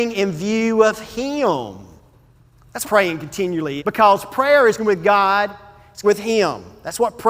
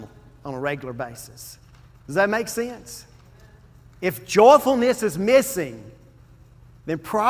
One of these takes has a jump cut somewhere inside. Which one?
first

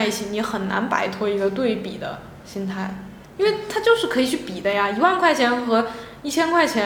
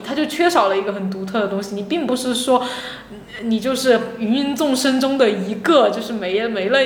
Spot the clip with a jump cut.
first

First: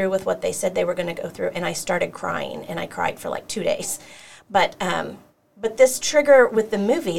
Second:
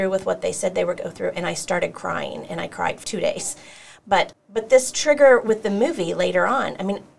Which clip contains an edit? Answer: second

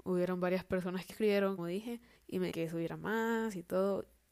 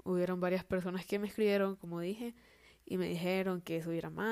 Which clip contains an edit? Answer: first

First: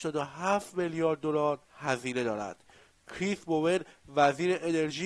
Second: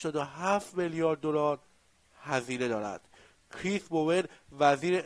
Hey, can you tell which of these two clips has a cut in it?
first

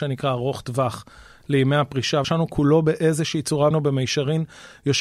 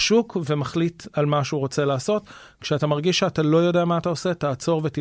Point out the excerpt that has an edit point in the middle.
first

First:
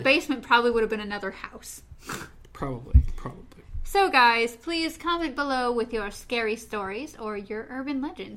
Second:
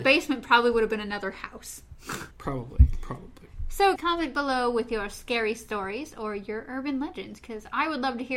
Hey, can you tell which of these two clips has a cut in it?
second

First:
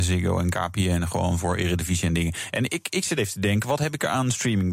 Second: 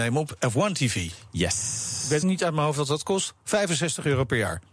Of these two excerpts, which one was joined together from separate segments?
second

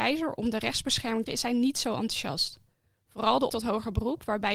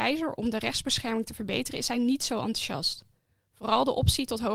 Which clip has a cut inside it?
first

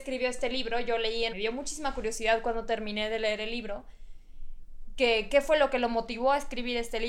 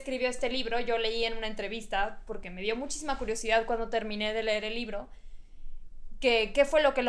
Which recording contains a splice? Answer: first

